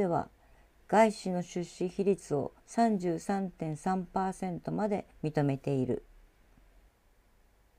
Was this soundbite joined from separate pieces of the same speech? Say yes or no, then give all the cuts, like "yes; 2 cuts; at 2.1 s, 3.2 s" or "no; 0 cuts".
yes; 2 cuts; at 2.6 s, 5.1 s